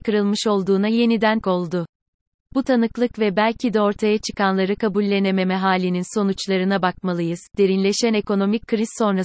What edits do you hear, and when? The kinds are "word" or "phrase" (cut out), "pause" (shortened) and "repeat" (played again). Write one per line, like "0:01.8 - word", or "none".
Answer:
0:01.4 - word